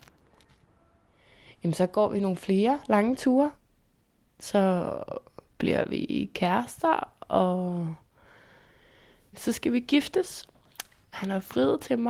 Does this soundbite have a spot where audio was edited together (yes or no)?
no